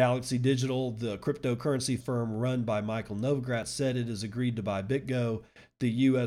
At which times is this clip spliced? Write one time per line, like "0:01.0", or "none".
0:02.0